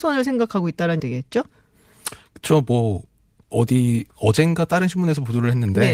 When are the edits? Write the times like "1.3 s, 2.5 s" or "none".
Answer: 1.0 s, 4.1 s